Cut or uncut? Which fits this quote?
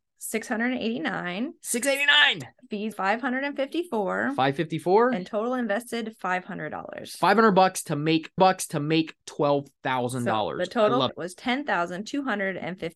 cut